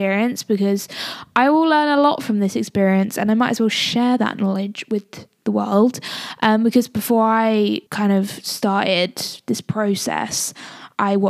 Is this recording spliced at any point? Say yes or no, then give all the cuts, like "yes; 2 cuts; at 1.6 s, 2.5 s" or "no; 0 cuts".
yes; 1 cut; at 7.9 s